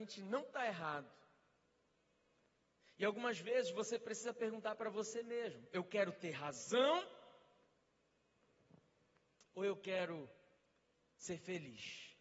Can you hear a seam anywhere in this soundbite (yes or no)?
no